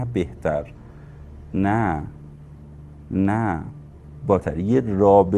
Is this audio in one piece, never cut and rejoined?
no; 1 cut; at 4.4 s

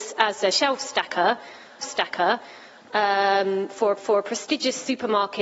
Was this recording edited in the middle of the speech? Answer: yes; 2 cuts; at 1.8 s, 4.0 s

